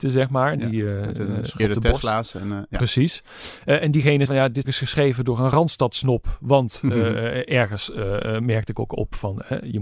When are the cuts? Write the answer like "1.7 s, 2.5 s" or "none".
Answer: 1.6 s, 4.3 s, 4.6 s